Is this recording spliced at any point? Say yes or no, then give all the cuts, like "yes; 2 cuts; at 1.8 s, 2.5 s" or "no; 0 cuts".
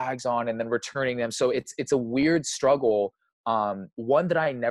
no; 0 cuts